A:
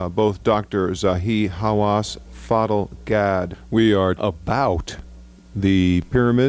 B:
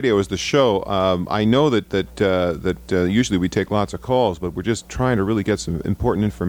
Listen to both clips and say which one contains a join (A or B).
A